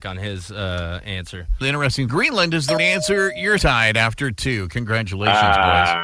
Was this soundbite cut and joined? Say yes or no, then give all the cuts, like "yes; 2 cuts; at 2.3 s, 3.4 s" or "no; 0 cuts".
yes; 4 cuts; at 1.6 s, 2.1 s, 2.8 s, 3.6 s